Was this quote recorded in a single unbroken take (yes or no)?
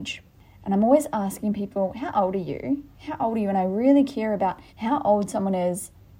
no